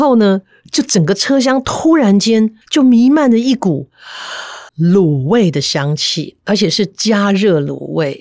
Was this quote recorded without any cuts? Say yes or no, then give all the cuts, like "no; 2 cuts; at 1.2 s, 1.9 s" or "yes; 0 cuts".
no; 2 cuts; at 2.6 s, 4.7 s